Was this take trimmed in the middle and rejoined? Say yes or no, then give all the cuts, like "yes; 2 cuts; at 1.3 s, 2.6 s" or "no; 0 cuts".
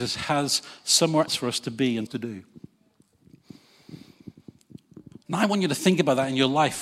yes; 3 cuts; at 1.3 s, 2.1 s, 5.2 s